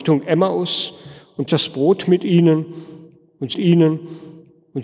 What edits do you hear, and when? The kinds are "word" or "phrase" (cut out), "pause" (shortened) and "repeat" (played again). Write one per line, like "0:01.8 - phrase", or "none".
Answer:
0:01.5 - word
0:03.5 - repeat